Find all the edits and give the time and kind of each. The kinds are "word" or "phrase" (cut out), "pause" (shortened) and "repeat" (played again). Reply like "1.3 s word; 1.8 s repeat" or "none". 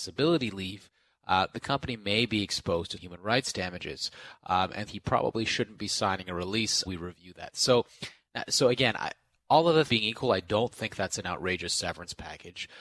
2.9 s word; 4.9 s word; 6.8 s word; 9.9 s word